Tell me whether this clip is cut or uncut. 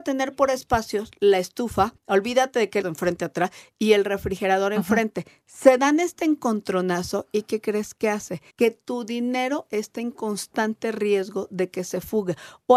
cut